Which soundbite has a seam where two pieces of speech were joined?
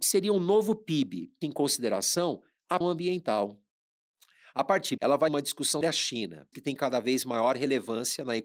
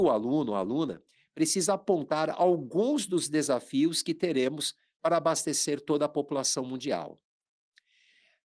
first; 6 cuts; at 1.4 s, 2.8 s, 5.0 s, 5.3 s, 5.8 s, 6.5 s

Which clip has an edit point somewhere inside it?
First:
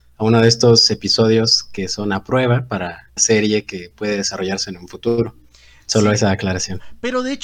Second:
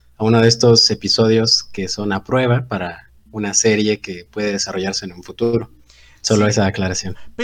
first; 1 cut; at 3.2 s

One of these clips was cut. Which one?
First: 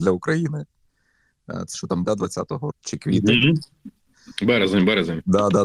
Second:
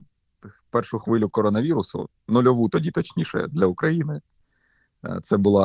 first; 3 cuts; at 1.7 s, 2.0 s, 2.7 s

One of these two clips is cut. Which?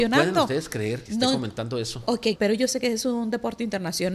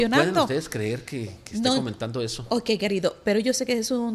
first; 2 cuts; at 1.1 s, 2.4 s

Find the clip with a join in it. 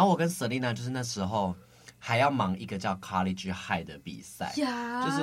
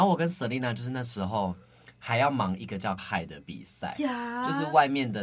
second; 1 cut; at 3.0 s

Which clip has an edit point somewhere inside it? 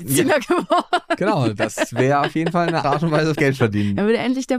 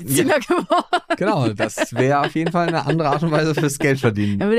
first; 2 cuts; at 2.8 s, 3.3 s

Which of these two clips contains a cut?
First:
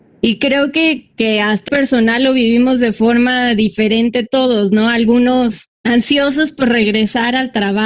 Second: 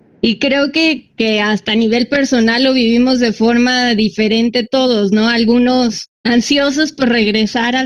first; 1 cut; at 1.7 s

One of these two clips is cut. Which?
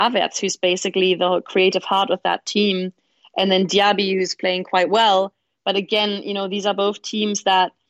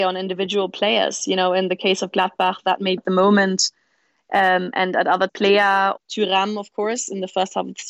second; 3 cuts; at 3.0 s, 5.3 s, 6.0 s

